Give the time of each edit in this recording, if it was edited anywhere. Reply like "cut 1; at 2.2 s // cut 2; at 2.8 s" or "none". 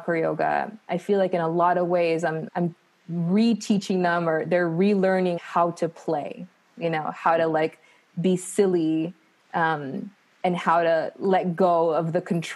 cut 1; at 2.5 s // cut 2; at 4.4 s // cut 3; at 5.4 s